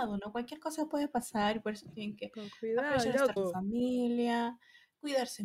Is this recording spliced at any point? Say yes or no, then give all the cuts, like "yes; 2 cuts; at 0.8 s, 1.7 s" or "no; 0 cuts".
yes; 1 cut; at 3.4 s